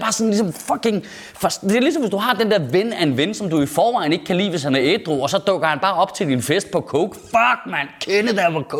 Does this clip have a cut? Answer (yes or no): no